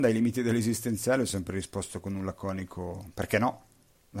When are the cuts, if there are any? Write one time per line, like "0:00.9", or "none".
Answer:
none